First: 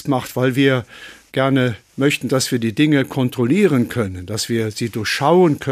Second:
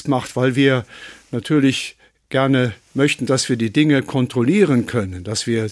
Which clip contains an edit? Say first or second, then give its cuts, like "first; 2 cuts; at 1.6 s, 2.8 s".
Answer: first; 1 cut; at 1.3 s